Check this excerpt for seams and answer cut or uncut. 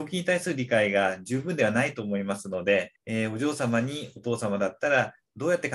cut